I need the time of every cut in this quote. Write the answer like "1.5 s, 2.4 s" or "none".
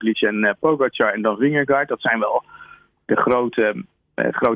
none